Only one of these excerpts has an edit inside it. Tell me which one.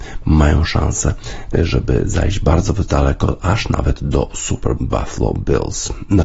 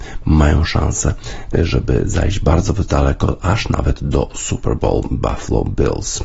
first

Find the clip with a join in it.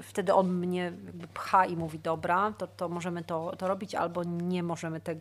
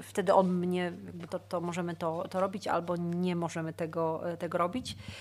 second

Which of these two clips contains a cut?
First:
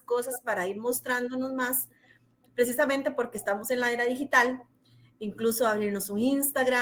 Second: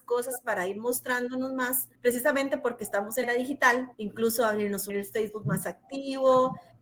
second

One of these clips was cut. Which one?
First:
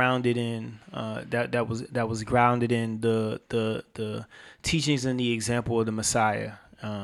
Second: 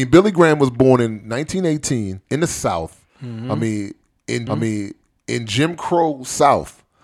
second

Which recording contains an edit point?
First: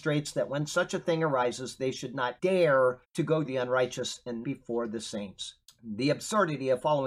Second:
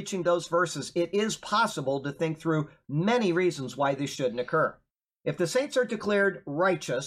first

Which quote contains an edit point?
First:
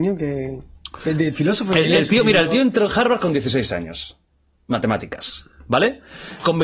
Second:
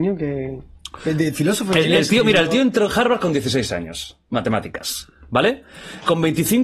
second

